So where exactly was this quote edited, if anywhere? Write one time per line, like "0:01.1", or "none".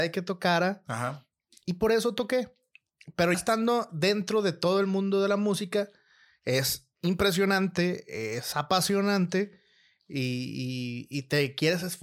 0:03.3